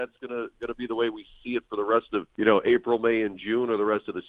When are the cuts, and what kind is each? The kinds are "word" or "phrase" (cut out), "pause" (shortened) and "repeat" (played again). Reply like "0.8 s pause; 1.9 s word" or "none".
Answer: 2.3 s pause